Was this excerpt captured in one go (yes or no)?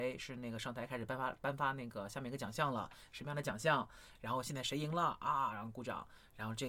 yes